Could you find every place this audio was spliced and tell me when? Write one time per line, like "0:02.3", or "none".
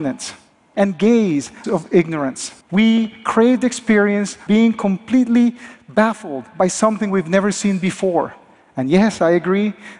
0:01.6
0:02.6
0:04.5